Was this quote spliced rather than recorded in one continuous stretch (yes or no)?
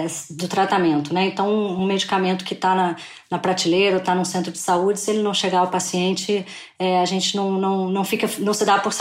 no